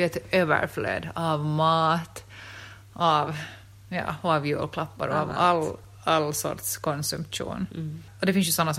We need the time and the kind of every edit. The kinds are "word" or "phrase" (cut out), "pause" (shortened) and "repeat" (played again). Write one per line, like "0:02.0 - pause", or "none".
none